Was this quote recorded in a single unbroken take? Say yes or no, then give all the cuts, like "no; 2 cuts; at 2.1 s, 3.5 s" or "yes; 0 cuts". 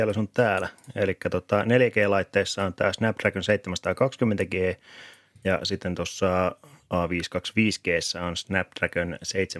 yes; 0 cuts